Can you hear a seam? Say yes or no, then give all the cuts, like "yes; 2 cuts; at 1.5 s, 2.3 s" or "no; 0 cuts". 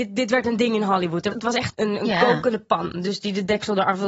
yes; 2 cuts; at 1.3 s, 1.7 s